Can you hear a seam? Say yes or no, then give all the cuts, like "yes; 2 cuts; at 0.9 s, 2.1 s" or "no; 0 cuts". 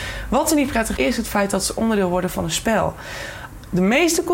yes; 1 cut; at 1.0 s